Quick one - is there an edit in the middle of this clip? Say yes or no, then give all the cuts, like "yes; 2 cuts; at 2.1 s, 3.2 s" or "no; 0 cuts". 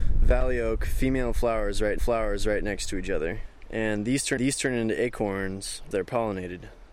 yes; 3 cuts; at 2.0 s, 4.4 s, 5.9 s